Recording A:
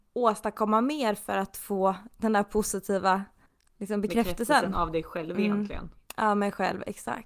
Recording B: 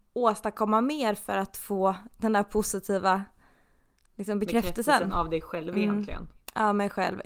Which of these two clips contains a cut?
A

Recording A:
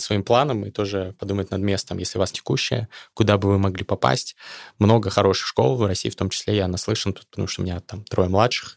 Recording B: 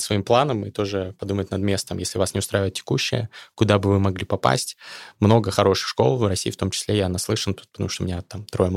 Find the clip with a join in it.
A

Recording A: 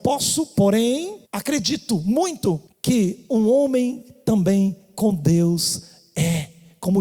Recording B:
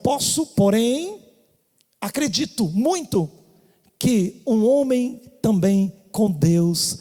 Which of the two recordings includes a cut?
A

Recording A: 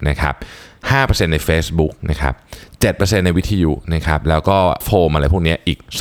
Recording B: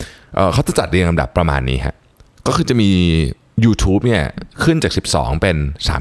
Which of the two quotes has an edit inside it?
A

